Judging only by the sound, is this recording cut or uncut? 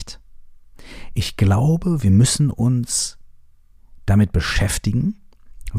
uncut